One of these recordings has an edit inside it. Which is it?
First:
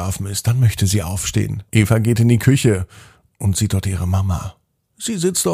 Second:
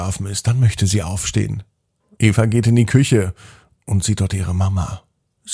first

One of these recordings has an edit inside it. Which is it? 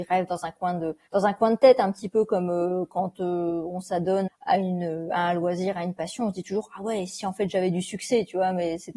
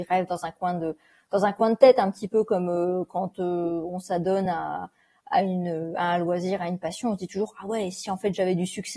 first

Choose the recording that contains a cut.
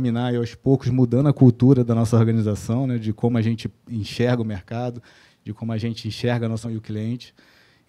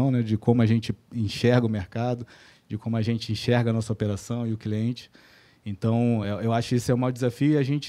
first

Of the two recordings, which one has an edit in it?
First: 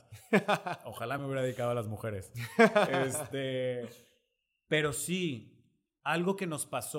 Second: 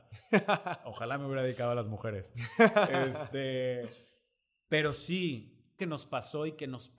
second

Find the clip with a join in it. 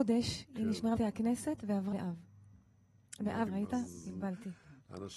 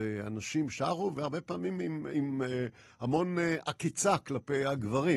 first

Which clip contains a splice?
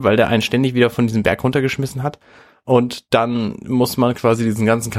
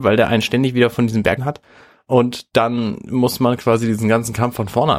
second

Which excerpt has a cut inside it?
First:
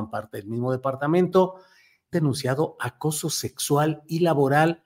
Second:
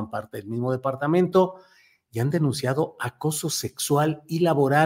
first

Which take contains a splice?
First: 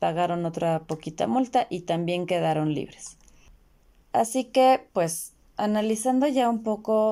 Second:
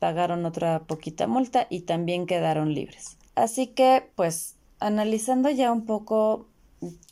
second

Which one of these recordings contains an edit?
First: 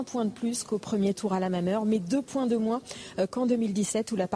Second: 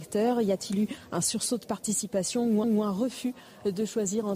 second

